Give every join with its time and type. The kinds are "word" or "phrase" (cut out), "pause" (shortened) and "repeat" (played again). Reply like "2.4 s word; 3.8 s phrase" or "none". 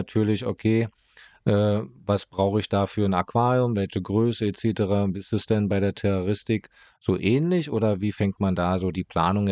none